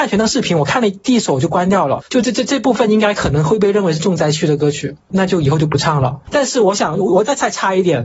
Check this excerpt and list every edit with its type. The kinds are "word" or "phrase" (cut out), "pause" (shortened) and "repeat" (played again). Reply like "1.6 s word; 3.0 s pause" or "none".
2.1 s pause